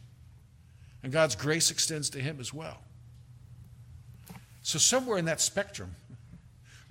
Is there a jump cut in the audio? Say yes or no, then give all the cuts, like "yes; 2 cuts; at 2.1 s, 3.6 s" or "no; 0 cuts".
no; 0 cuts